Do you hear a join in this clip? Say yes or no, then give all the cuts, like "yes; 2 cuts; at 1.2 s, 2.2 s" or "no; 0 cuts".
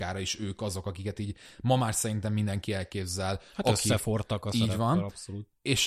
no; 0 cuts